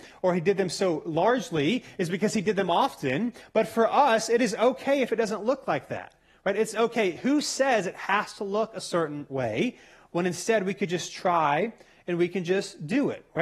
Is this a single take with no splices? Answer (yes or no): yes